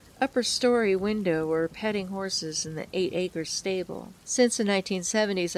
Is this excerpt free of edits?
no; 1 cut; at 4.2 s

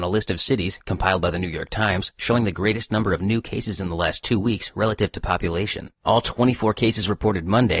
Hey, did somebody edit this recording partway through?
yes; 1 cut; at 6.0 s

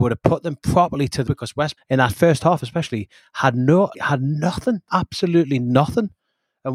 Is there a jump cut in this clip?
yes; 4 cuts; at 1.3 s, 1.8 s, 3.9 s, 4.9 s

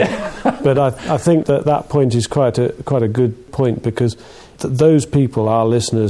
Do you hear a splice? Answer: yes; 1 cut; at 1.4 s

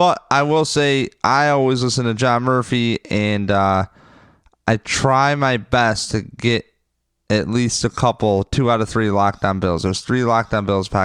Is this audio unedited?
yes; 0 cuts

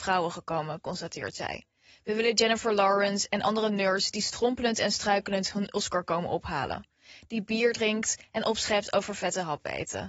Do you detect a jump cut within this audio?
no; 0 cuts

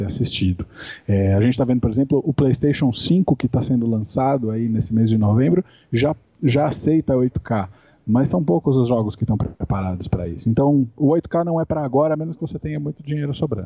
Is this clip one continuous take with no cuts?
yes; 0 cuts

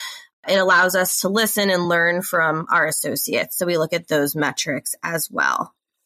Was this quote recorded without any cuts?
yes; 0 cuts

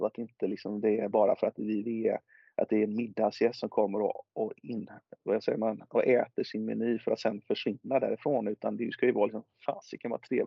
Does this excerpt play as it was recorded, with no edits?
yes; 0 cuts

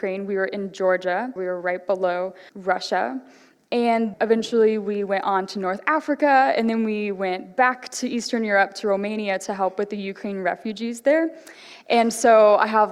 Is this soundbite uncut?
no; 3 cuts; at 1.4 s, 2.5 s, 4.1 s

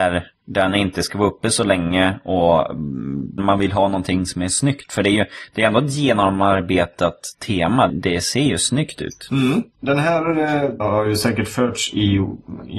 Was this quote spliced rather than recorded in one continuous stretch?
yes; 3 cuts; at 3.4 s, 7.9 s, 10.8 s

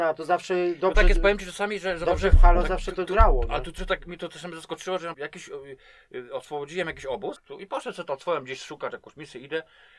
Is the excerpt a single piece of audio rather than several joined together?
no; 3 cuts; at 3.8 s, 5.1 s, 7.4 s

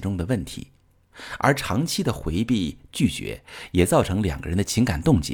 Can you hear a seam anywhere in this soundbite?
yes; 1 cut; at 2.9 s

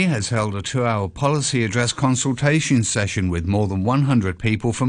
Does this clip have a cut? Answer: no; 0 cuts

